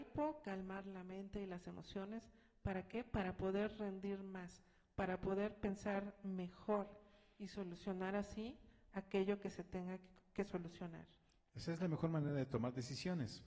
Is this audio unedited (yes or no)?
yes